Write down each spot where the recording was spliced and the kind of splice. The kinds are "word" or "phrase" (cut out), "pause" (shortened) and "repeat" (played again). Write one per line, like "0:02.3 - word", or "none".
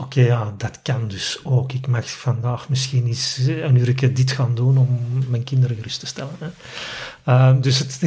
none